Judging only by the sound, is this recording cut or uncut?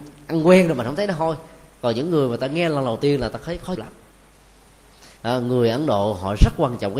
cut